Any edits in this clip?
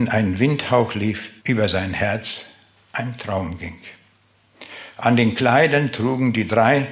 yes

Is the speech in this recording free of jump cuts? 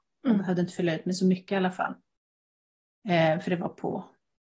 yes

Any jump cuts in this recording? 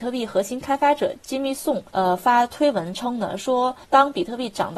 yes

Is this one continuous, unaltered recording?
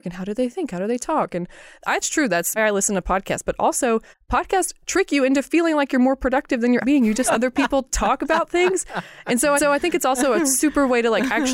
no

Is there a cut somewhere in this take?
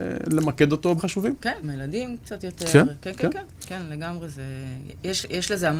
yes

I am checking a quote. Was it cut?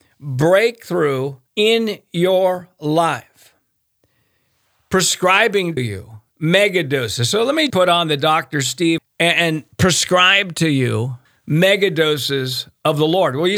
yes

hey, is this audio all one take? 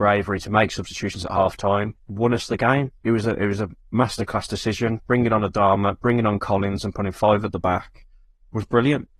no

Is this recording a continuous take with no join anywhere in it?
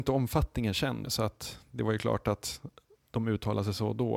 no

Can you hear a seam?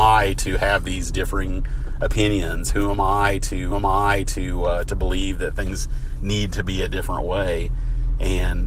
yes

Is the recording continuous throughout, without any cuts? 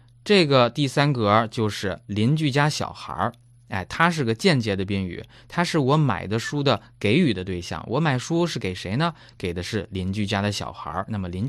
yes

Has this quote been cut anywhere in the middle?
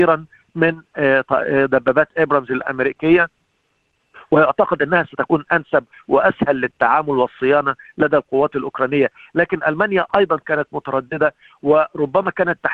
no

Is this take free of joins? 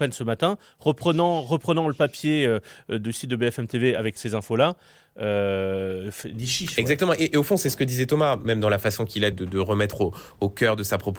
no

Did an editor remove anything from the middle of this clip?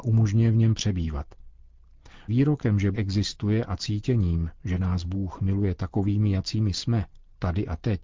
yes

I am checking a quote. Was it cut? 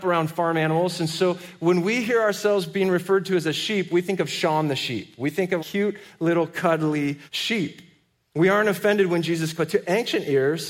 yes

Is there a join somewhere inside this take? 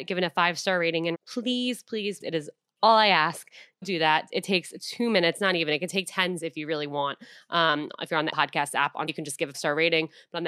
yes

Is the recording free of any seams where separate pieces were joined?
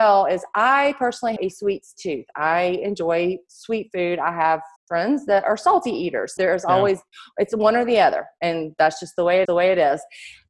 no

